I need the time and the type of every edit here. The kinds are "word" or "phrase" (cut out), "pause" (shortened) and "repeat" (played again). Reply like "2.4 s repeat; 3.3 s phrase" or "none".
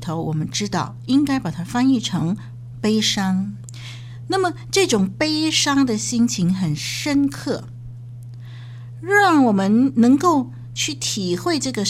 2.7 s word